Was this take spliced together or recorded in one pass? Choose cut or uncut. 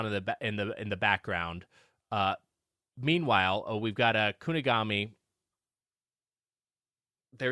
uncut